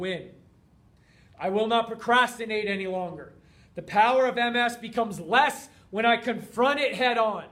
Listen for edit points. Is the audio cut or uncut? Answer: uncut